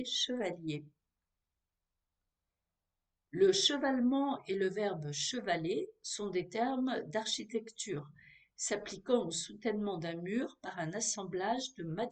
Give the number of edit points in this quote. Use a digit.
0